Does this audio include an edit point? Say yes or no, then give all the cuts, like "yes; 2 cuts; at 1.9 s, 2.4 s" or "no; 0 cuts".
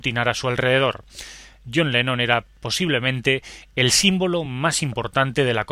no; 0 cuts